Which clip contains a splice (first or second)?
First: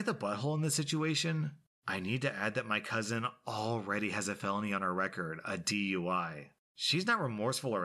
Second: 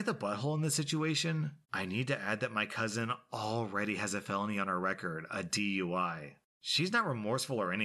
second